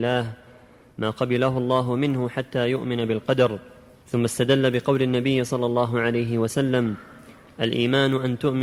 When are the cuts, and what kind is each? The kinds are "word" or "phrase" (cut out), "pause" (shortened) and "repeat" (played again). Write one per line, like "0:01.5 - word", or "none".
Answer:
none